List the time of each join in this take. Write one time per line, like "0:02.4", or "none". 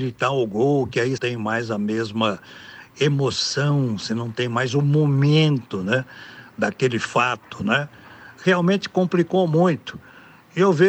0:01.2